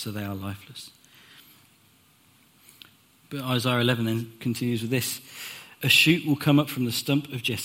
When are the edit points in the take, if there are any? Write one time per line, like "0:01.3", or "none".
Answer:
none